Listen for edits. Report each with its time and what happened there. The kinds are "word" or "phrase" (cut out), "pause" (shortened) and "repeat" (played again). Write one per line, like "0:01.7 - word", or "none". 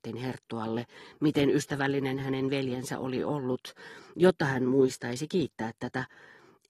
none